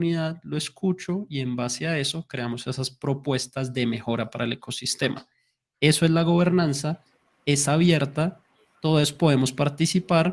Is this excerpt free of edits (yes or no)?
yes